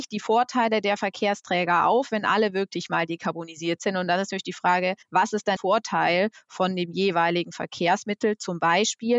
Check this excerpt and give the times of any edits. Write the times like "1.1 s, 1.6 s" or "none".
5.0 s, 5.6 s